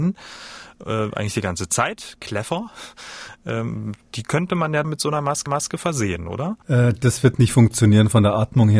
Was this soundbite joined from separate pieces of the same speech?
yes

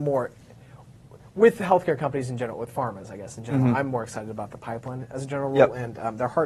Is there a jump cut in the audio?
no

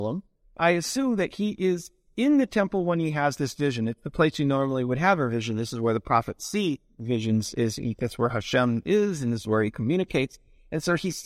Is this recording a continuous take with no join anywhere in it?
yes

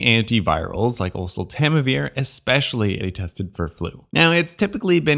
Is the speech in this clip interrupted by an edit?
yes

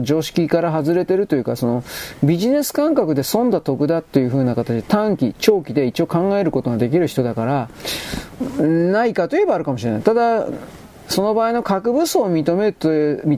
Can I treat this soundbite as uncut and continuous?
no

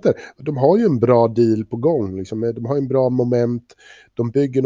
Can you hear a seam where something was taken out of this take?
no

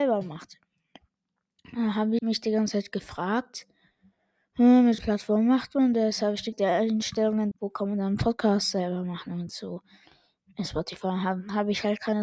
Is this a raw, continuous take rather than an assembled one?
no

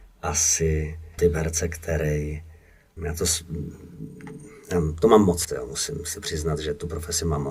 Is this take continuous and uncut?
no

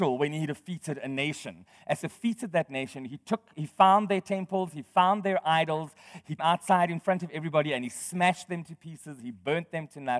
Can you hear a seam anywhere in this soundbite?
yes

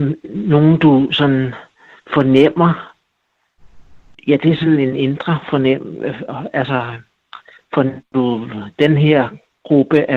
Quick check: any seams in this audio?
no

